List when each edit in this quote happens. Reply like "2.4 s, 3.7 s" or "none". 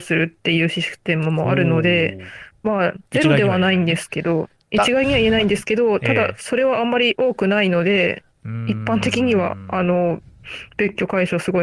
3.1 s